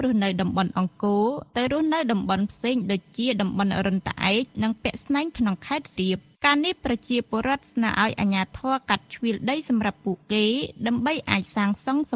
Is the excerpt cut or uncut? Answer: cut